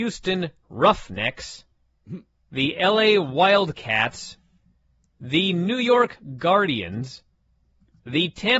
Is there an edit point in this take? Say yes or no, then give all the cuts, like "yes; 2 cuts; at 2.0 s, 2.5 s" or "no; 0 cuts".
no; 0 cuts